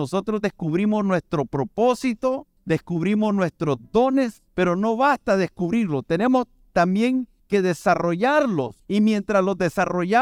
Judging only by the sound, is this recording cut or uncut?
uncut